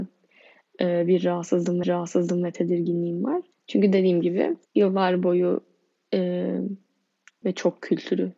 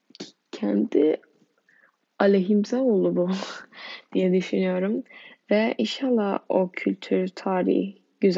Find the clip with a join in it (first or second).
first